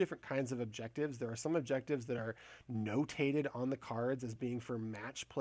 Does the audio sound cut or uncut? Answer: uncut